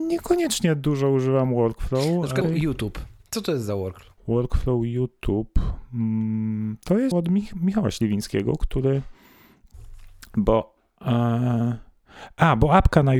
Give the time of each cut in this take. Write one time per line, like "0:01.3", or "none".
0:02.4
0:04.2
0:07.1